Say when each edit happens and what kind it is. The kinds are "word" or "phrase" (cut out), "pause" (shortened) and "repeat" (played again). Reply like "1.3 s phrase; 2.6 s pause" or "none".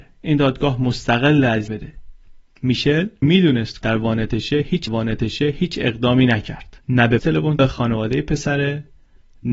1.7 s phrase; 3.2 s word; 3.8 s word; 4.9 s repeat; 6.8 s pause; 7.2 s word; 7.6 s phrase

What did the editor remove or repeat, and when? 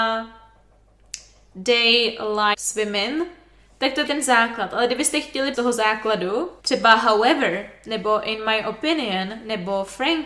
2.5 s word; 4.1 s word; 5.5 s phrase; 6.6 s pause

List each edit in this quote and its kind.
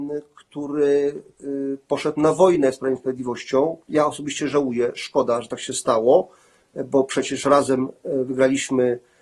3.8 s pause

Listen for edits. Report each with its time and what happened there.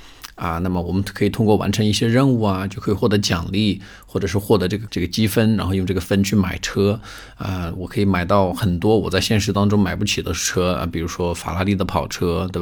4.9 s word

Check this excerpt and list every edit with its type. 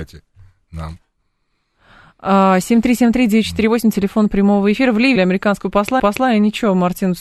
5.2 s word; 6.0 s repeat

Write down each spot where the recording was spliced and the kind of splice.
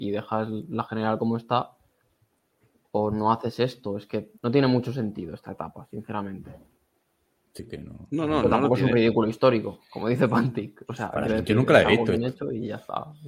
4.4 s pause; 7.6 s word

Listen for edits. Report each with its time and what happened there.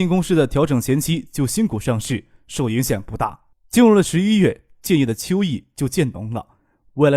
3.5 s pause

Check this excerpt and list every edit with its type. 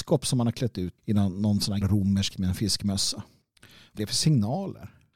1.0 s word; 1.8 s word; 2.3 s word; 4.0 s word

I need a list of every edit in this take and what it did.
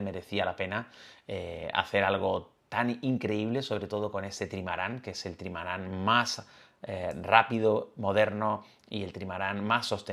none

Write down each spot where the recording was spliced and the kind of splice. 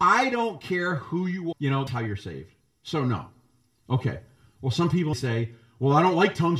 1.5 s word; 1.9 s word; 5.1 s word

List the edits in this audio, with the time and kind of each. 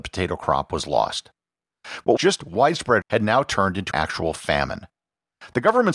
2.2 s word; 3.0 s word; 3.9 s word

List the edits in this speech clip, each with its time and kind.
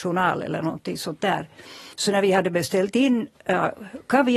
1.9 s pause

